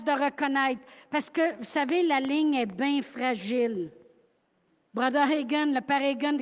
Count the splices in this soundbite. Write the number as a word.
one